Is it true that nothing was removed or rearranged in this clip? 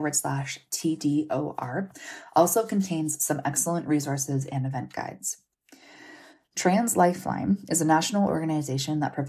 yes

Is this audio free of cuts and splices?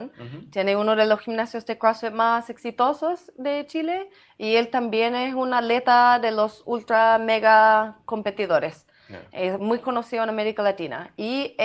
yes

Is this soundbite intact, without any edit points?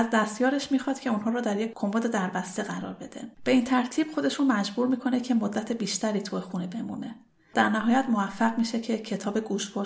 no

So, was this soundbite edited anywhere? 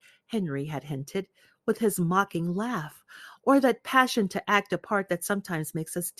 no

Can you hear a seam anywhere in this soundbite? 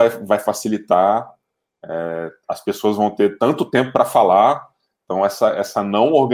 no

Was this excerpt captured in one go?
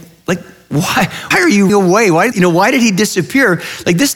no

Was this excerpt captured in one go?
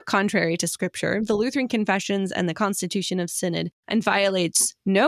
yes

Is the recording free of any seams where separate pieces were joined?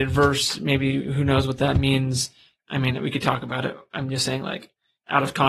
yes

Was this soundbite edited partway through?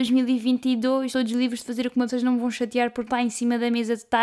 yes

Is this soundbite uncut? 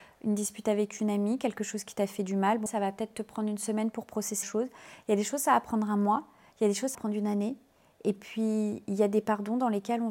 no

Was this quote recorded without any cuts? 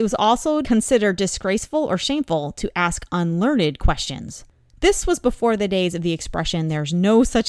yes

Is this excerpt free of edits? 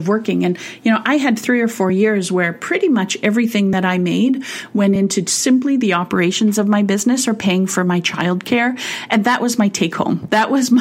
yes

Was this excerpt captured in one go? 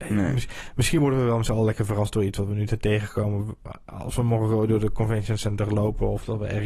yes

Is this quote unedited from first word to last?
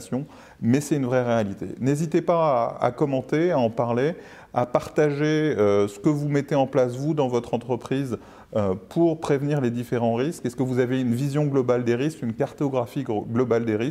yes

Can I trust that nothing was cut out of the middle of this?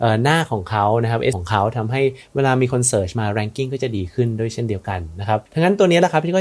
no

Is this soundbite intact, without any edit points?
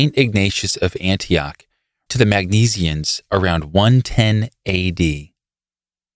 no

